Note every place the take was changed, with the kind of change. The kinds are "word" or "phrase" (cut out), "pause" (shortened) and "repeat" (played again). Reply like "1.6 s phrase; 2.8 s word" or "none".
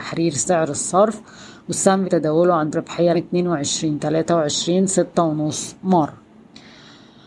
2.0 s word; 2.7 s word; 3.1 s word